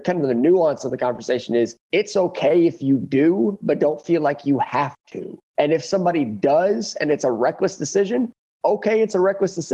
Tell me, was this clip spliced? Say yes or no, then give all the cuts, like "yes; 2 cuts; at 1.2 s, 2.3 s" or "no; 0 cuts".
yes; 2 cuts; at 1.8 s, 5.5 s